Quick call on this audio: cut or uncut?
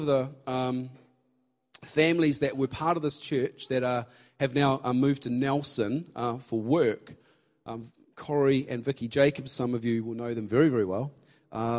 uncut